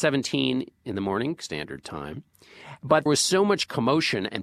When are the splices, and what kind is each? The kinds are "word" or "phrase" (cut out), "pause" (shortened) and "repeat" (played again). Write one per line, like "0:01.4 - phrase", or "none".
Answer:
0:01.4 - word
0:03.1 - word